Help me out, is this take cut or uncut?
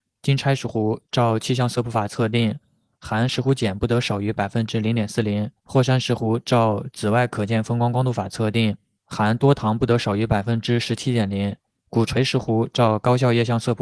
cut